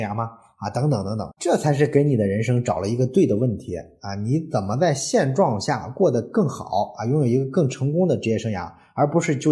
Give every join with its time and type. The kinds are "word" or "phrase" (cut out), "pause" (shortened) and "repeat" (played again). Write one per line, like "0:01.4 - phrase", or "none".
0:01.4 - phrase